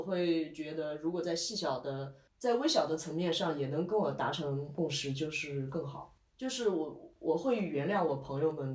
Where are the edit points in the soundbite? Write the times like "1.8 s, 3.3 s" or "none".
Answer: 6.3 s